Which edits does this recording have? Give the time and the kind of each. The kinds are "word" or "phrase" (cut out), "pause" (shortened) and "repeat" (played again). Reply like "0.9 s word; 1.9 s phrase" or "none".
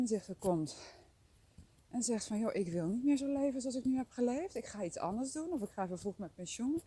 none